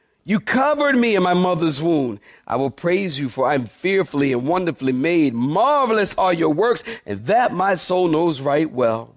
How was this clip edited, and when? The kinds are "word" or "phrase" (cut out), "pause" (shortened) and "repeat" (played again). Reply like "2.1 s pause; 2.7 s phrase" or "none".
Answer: none